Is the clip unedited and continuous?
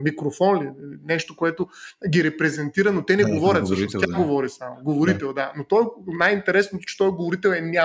yes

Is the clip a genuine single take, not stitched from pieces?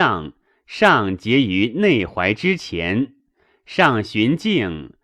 yes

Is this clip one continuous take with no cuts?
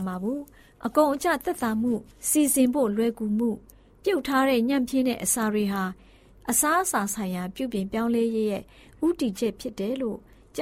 no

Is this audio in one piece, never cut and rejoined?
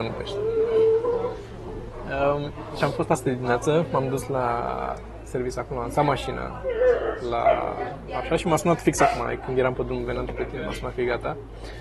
yes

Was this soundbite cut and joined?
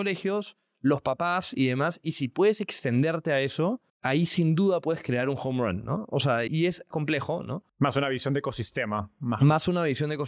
yes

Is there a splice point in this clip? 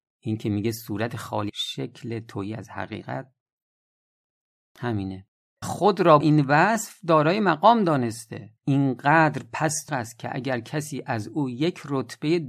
yes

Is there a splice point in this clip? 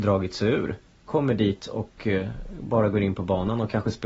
no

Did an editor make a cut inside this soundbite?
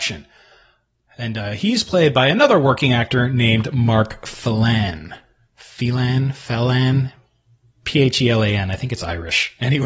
no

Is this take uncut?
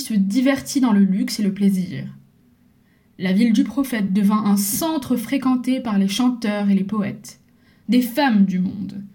yes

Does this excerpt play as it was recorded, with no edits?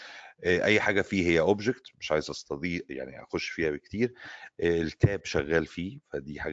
yes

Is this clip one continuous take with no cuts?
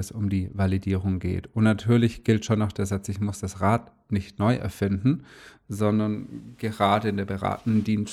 yes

